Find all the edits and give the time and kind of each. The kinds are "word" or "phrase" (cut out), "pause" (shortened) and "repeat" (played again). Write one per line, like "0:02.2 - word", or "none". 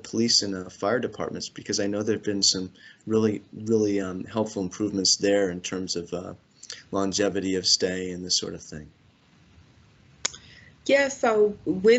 none